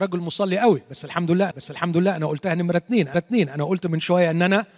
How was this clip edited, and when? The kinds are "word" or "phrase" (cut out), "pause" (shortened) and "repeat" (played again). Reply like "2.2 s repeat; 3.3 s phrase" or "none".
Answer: 1.5 s repeat; 3.1 s repeat